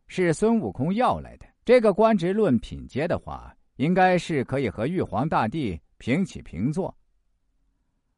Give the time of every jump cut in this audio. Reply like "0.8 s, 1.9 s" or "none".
1.5 s